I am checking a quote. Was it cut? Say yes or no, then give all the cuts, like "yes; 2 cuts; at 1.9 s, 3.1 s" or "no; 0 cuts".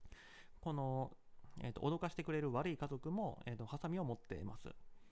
no; 0 cuts